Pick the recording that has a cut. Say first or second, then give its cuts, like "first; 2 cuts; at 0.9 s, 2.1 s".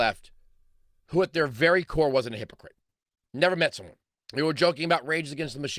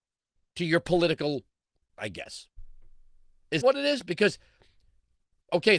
second; 2 cuts; at 2.0 s, 3.6 s